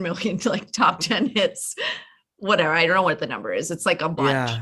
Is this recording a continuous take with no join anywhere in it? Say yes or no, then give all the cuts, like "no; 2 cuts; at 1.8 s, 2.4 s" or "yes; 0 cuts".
yes; 0 cuts